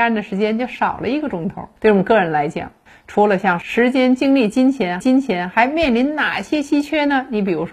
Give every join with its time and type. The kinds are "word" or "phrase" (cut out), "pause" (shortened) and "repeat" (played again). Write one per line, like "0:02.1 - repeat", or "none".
0:01.8 - pause
0:05.0 - repeat